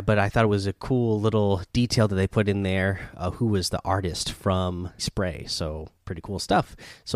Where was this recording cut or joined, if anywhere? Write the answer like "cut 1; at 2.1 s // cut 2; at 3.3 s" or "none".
cut 1; at 5.0 s // cut 2; at 6.0 s

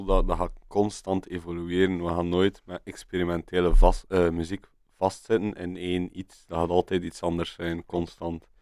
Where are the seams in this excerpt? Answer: none

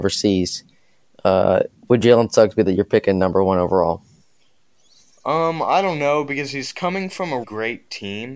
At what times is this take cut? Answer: cut 1; at 2.7 s // cut 2; at 7.4 s

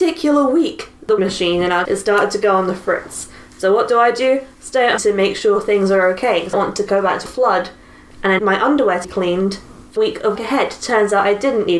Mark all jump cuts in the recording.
cut 1; at 1.2 s // cut 2; at 1.8 s // cut 3; at 5.0 s // cut 4; at 6.5 s // cut 5; at 7.3 s // cut 6; at 8.4 s // cut 7; at 9.0 s // cut 8; at 10.0 s // cut 9; at 10.4 s

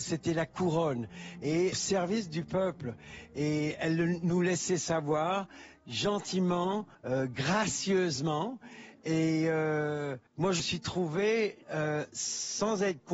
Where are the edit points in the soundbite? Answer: cut 1; at 1.7 s // cut 2; at 6.9 s // cut 3; at 10.3 s // cut 4; at 10.6 s // cut 5; at 11.6 s

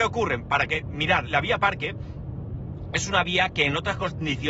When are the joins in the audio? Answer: cut 1; at 1.3 s

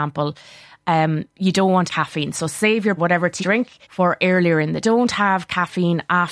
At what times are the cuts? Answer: cut 1; at 1.9 s // cut 2; at 3.0 s // cut 3; at 3.4 s // cut 4; at 3.8 s // cut 5; at 4.8 s

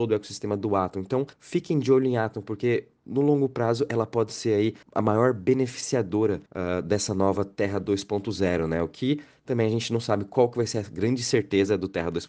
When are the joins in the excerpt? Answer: cut 1; at 1.3 s // cut 2; at 4.8 s // cut 3; at 6.5 s

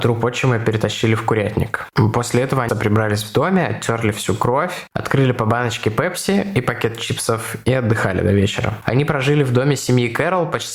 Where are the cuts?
cut 1; at 2.7 s

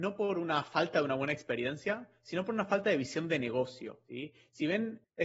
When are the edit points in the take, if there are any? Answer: cut 1; at 4.1 s

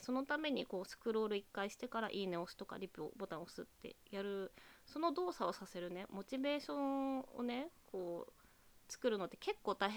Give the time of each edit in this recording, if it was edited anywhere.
none

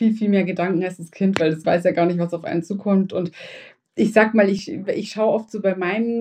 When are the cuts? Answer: cut 1; at 1.6 s

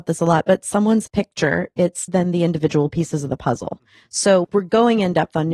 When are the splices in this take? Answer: cut 1; at 1.1 s // cut 2; at 2.1 s // cut 3; at 4.4 s

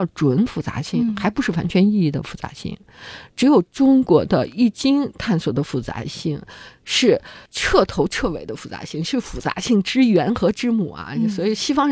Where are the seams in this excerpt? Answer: cut 1; at 3.7 s // cut 2; at 7.5 s

